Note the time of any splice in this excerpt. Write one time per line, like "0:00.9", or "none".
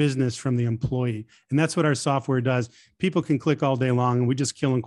none